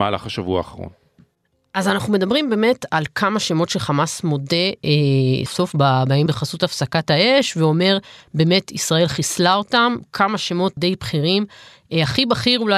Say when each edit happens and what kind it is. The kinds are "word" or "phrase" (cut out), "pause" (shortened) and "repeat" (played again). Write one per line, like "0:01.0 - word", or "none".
0:05.5 - word
0:06.3 - word
0:10.8 - word

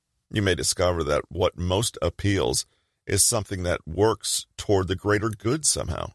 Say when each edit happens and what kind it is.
none

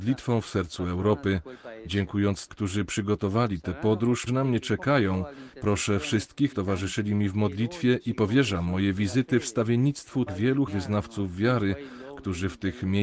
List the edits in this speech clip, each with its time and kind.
0:02.5 - word
0:04.3 - phrase
0:06.5 - word
0:10.3 - word
0:10.7 - word

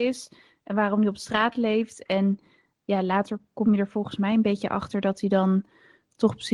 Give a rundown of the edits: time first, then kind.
none

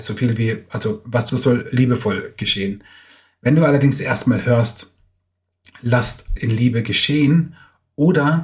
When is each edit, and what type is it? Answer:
0:01.3 - word
0:06.4 - word

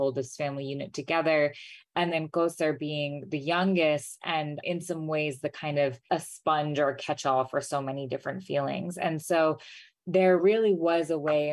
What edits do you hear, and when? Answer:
none

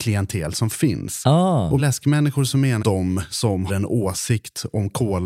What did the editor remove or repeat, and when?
0:01.8 - word
0:02.8 - word
0:03.7 - word

